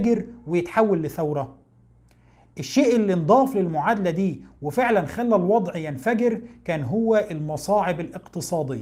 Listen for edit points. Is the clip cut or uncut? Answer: uncut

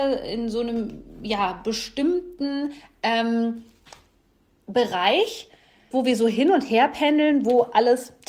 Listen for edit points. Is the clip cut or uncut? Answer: cut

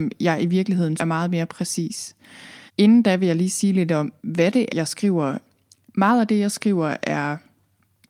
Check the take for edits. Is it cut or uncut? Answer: cut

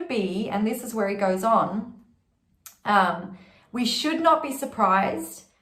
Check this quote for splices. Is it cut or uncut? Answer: uncut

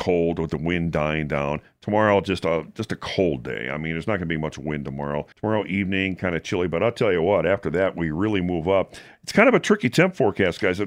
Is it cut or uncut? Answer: cut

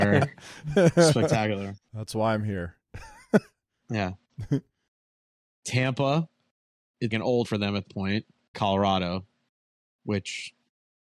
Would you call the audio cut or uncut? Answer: cut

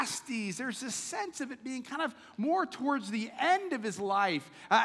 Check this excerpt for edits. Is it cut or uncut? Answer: uncut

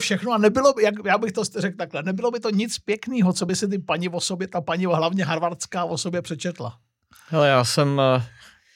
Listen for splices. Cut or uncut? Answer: uncut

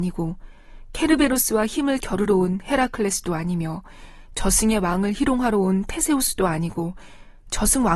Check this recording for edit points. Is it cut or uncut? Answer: uncut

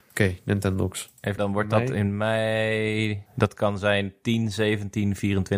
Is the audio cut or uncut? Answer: cut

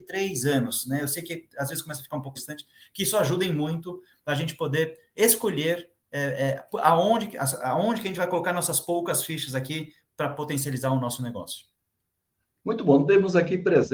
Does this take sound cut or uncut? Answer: cut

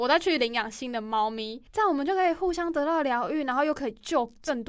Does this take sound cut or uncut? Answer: cut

